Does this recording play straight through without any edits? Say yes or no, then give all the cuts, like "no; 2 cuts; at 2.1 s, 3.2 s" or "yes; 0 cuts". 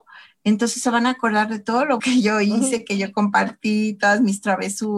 no; 1 cut; at 2.0 s